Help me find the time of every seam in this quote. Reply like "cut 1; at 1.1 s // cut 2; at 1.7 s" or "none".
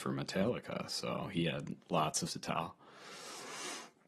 cut 1; at 2.3 s